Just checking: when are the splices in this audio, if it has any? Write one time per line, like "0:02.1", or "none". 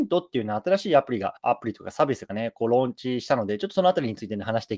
0:01.4